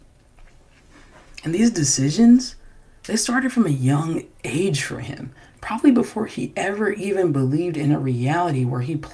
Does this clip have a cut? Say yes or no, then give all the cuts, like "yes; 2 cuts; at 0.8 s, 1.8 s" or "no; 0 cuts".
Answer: no; 0 cuts